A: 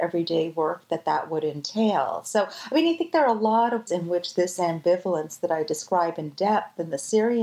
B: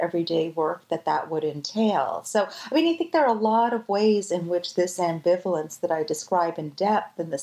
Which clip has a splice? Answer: A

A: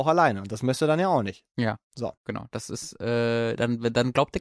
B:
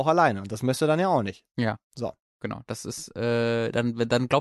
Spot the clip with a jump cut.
A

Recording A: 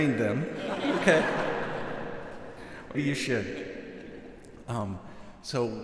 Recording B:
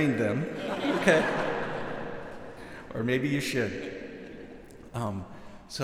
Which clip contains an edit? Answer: A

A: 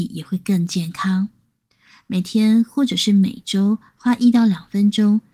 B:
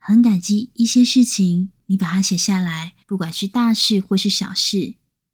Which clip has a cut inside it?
B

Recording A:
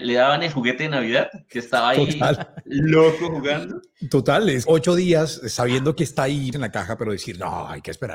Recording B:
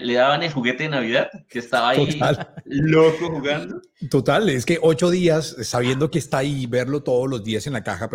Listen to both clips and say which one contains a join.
A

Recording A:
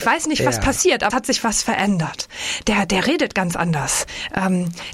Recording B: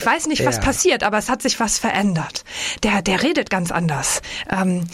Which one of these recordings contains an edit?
A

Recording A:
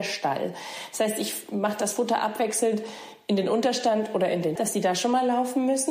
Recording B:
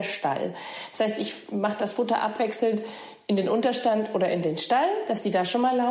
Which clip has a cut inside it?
A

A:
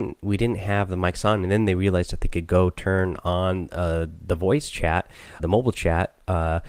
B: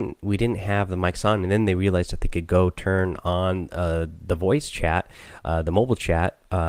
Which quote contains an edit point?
A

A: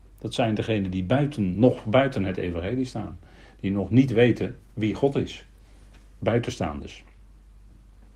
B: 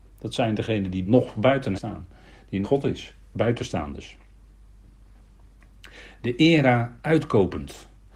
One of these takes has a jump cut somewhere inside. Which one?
B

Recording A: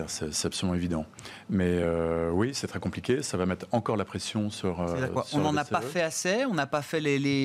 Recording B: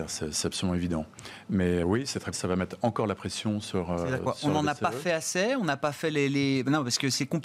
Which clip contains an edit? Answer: B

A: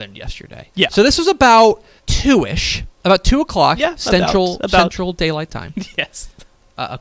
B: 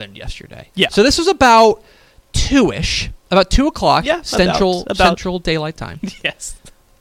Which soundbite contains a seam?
A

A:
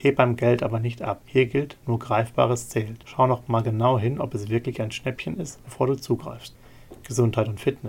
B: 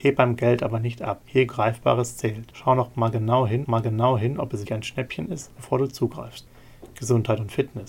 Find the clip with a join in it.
B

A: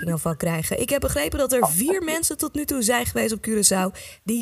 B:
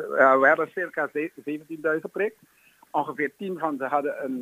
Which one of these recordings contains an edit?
B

